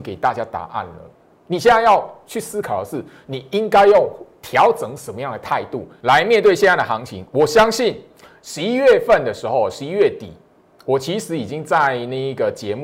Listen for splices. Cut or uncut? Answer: uncut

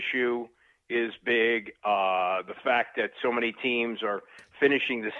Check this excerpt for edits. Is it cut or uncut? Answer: uncut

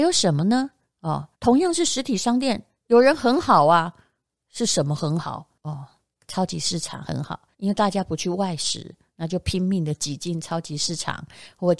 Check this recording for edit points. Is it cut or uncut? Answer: cut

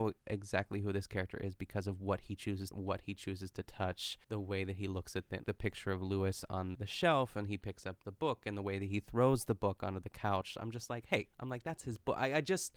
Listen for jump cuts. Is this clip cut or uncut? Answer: cut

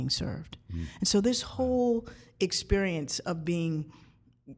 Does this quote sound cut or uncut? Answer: uncut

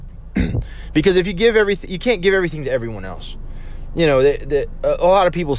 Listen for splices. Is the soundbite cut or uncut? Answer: uncut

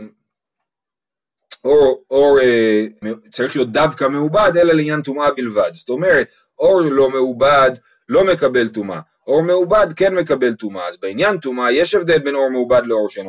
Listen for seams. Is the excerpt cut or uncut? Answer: cut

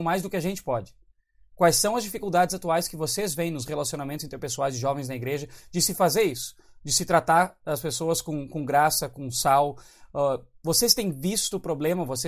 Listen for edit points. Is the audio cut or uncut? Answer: uncut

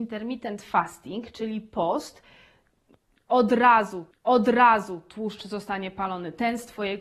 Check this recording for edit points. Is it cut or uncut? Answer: cut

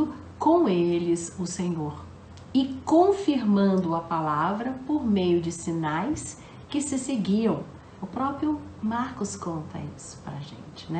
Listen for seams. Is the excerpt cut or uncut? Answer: uncut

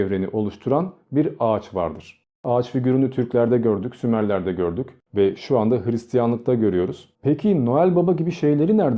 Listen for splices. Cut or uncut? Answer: cut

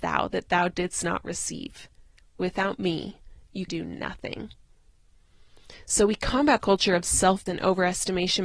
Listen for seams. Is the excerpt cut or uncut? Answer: cut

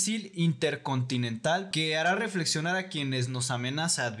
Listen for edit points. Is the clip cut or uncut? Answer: cut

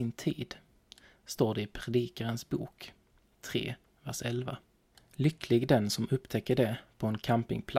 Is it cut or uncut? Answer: uncut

